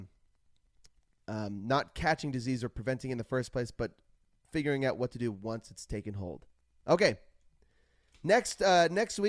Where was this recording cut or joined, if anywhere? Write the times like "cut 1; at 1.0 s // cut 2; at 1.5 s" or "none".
none